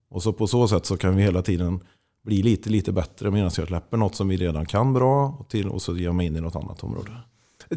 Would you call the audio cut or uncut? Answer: uncut